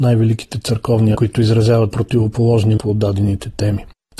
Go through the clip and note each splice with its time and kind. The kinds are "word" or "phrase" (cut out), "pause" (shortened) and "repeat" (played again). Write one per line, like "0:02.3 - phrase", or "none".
0:01.1 - word
0:01.9 - word
0:02.8 - word